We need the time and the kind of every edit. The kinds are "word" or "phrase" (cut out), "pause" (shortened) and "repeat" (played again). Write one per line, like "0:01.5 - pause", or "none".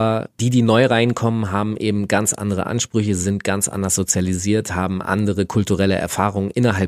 none